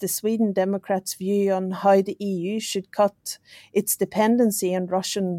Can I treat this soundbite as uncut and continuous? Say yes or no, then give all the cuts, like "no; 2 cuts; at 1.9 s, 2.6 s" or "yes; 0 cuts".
yes; 0 cuts